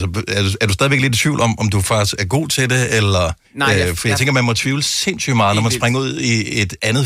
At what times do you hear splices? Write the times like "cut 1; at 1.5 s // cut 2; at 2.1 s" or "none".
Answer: cut 1; at 3.4 s

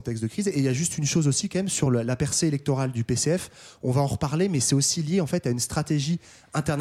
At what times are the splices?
none

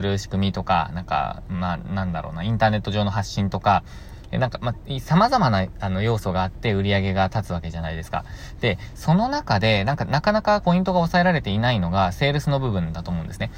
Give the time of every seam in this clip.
cut 1; at 10.6 s

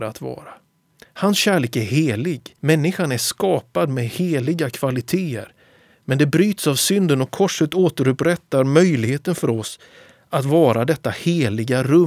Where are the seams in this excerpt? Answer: cut 1; at 2.6 s

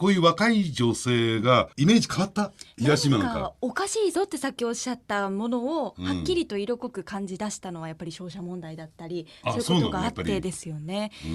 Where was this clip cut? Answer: cut 1; at 1.7 s

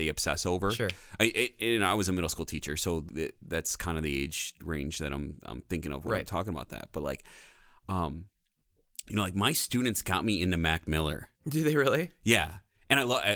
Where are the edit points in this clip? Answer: cut 1; at 3.1 s // cut 2; at 11.4 s

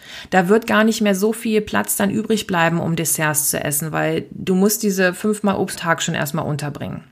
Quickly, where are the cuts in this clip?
cut 1; at 5.8 s

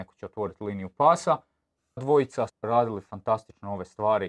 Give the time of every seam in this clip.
cut 1; at 2.0 s // cut 2; at 2.5 s

